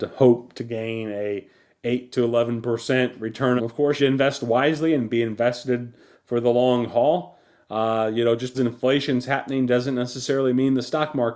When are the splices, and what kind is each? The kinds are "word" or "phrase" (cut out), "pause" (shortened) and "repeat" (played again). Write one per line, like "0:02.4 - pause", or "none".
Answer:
0:03.6 - phrase
0:04.0 - phrase
0:08.5 - word